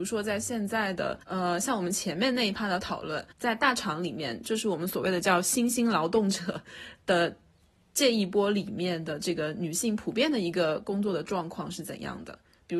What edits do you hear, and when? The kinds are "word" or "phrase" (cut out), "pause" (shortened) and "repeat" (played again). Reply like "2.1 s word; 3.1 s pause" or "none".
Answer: 1.2 s pause; 3.3 s pause